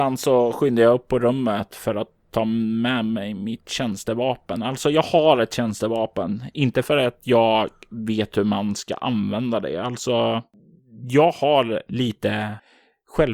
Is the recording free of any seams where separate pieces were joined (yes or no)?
yes